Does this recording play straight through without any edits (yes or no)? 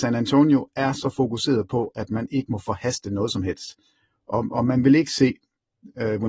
yes